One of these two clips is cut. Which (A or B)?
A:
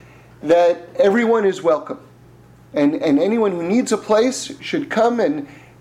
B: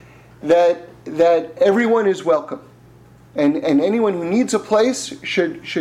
A